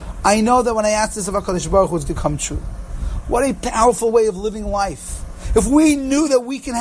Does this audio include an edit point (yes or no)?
yes